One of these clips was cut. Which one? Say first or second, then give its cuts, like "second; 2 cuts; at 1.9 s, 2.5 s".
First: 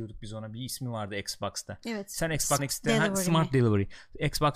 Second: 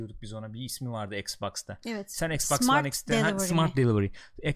first; 1 cut; at 2.6 s